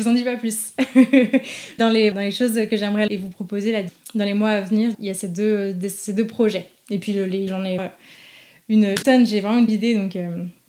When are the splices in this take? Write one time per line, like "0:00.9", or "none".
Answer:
0:01.8
0:02.1
0:03.1
0:04.9
0:07.5
0:07.8
0:09.0
0:09.7